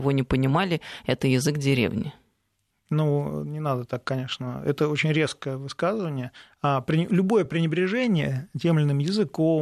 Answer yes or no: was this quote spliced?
no